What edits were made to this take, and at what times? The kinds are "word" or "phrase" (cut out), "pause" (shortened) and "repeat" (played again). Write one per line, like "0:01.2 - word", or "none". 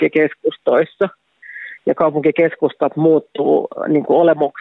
none